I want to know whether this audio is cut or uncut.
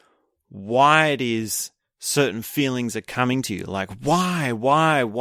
uncut